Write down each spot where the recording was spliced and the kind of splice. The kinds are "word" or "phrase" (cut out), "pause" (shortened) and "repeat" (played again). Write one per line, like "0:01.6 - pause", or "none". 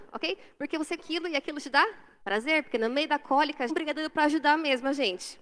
0:01.0 - word
0:02.2 - pause
0:03.7 - phrase